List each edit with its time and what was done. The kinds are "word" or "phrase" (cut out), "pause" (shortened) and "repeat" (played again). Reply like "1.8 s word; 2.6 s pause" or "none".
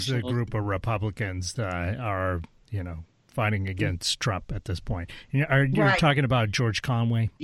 1.6 s word